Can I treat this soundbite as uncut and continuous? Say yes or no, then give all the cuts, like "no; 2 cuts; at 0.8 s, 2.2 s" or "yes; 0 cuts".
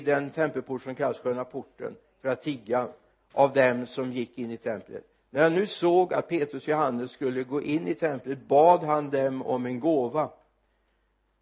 yes; 0 cuts